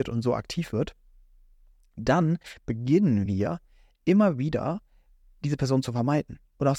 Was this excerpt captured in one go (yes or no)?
yes